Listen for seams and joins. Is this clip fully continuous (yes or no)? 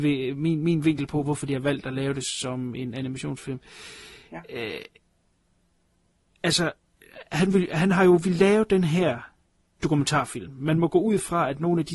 no